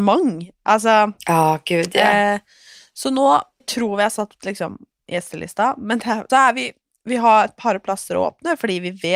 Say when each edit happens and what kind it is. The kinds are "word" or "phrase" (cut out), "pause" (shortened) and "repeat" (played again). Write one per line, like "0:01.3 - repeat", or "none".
0:03.6 - word
0:06.3 - word